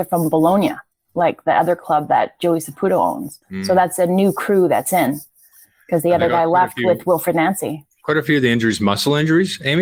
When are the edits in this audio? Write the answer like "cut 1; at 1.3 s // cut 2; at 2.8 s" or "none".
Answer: cut 1; at 3.4 s